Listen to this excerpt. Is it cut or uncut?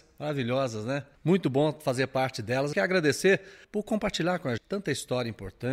cut